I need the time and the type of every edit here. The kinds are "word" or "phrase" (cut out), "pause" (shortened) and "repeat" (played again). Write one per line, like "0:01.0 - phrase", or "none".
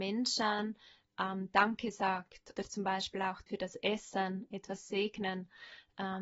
0:02.6 - word
0:03.5 - word